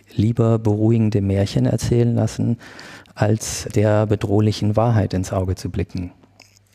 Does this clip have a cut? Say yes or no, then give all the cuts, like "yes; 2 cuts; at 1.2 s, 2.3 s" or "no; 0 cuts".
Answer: yes; 1 cut; at 3.7 s